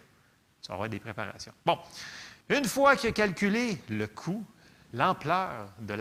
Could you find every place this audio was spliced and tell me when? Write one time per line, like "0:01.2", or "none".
0:02.4